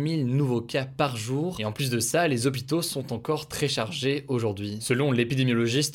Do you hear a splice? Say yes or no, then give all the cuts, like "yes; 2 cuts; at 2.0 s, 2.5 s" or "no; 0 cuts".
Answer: no; 0 cuts